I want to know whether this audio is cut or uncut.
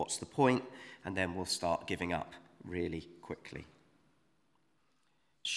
uncut